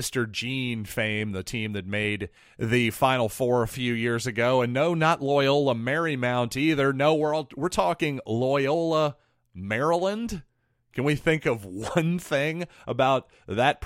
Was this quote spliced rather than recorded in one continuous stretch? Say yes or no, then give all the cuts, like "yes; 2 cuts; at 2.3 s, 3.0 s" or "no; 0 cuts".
yes; 1 cut; at 2.4 s